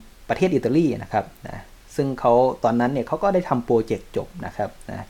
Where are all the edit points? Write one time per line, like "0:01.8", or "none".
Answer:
none